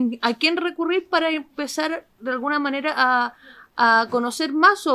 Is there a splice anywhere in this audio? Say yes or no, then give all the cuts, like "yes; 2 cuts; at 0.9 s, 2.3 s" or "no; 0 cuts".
no; 0 cuts